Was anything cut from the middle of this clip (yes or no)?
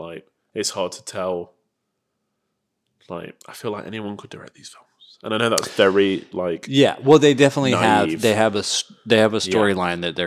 yes